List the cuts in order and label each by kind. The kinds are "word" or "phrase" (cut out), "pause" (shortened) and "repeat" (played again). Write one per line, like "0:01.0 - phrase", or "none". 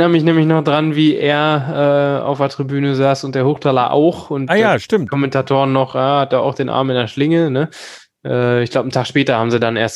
none